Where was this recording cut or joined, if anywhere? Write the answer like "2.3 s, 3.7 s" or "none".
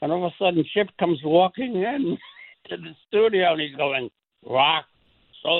none